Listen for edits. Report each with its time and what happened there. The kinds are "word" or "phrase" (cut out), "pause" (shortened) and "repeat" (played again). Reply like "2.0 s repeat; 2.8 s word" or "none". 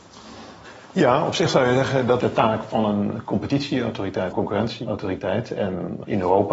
2.2 s word; 4.3 s word